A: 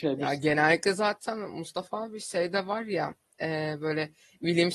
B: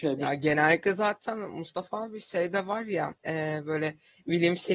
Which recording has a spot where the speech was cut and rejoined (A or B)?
B